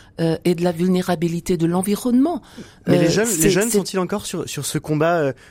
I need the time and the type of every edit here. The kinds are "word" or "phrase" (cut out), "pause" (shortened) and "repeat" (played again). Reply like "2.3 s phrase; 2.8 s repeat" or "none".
none